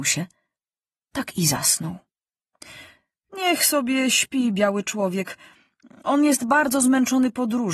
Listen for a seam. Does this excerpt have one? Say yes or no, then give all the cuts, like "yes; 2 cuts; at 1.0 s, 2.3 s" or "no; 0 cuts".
no; 0 cuts